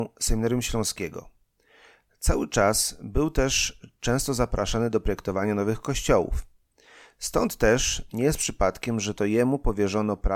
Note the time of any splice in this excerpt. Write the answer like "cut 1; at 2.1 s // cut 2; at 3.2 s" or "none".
none